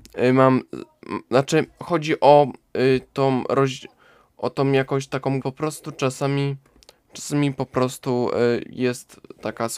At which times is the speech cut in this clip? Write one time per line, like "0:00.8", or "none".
0:05.4

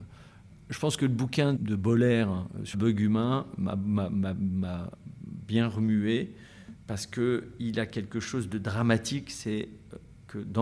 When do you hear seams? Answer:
0:01.6
0:02.7

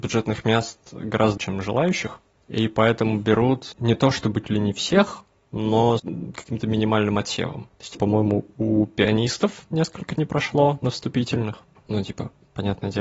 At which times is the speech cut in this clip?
0:01.4
0:03.7
0:04.4
0:06.0
0:07.9
0:10.1

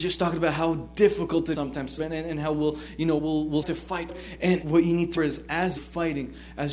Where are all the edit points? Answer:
0:01.5
0:02.0
0:03.2
0:03.6
0:04.1
0:04.6
0:05.2
0:05.8

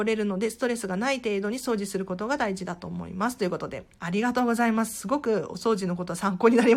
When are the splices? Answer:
0:03.9

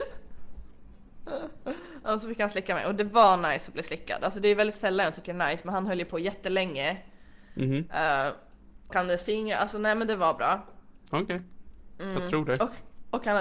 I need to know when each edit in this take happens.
0:08.9

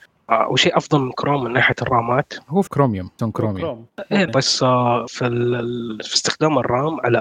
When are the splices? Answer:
0:02.7
0:03.2
0:03.9
0:04.3
0:05.1

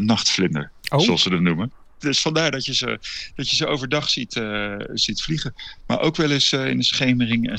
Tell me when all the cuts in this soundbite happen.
none

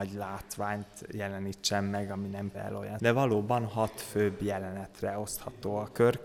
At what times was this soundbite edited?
0:02.5
0:03.0

